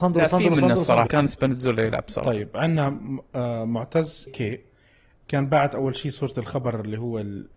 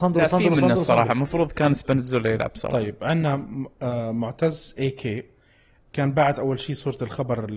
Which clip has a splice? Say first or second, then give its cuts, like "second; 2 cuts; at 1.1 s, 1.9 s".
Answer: first; 2 cuts; at 1.1 s, 4.3 s